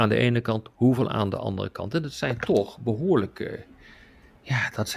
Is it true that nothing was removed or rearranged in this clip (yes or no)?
yes